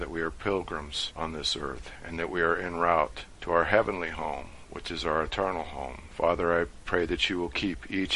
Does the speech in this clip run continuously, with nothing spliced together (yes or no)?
yes